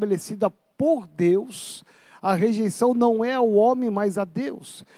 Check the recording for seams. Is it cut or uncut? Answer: uncut